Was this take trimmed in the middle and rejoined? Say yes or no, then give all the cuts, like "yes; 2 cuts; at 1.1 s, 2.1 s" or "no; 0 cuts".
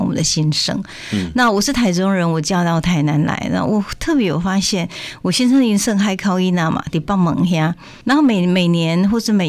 yes; 1 cut; at 8.0 s